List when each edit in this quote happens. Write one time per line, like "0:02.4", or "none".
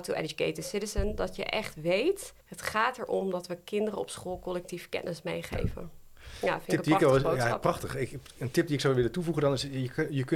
0:02.4